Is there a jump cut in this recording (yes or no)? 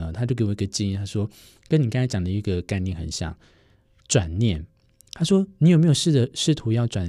no